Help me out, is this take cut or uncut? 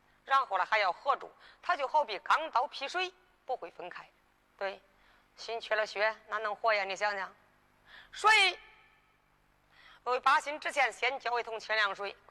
uncut